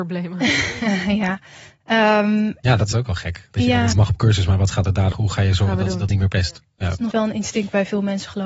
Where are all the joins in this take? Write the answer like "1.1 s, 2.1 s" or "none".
2.9 s, 3.9 s, 5.1 s, 6.1 s, 7.1 s